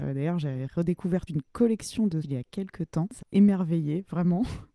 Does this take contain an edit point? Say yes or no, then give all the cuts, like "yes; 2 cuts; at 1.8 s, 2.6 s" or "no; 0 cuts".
yes; 3 cuts; at 1.3 s, 2.2 s, 3.2 s